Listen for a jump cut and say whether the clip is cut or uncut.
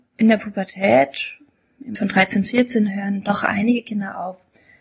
cut